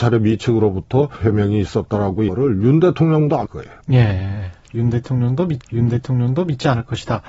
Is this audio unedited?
no; 5 cuts; at 1.2 s, 2.3 s, 3.5 s, 3.8 s, 5.6 s

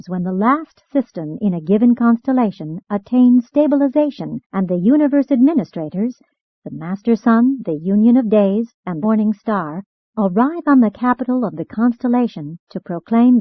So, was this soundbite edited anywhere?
yes; 2 cuts; at 4.4 s, 9.0 s

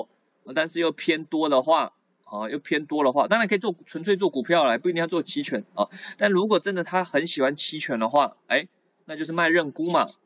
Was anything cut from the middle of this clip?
no; 0 cuts

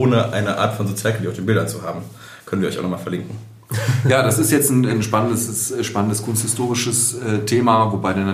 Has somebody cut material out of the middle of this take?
no; 0 cuts

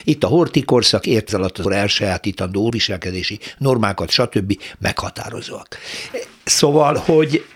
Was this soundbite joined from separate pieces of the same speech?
yes; 3 cuts; at 1.3 s, 1.6 s, 2.7 s

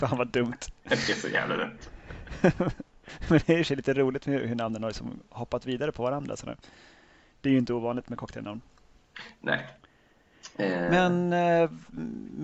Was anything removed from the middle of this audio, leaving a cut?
no; 0 cuts

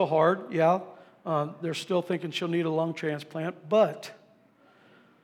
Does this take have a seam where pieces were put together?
no; 0 cuts

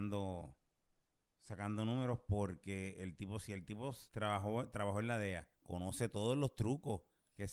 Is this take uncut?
no; 2 cuts; at 4.1 s, 5.5 s

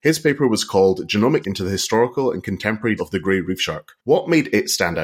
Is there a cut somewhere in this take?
yes; 3 cuts; at 1.4 s, 3.0 s, 4.0 s

